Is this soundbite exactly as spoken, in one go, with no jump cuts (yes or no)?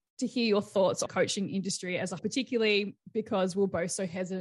no